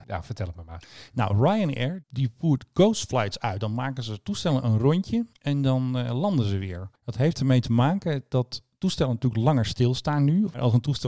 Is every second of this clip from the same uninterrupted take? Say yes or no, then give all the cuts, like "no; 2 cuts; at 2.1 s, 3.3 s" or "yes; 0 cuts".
yes; 0 cuts